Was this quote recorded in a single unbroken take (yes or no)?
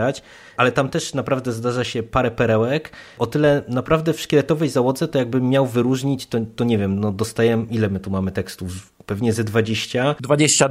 yes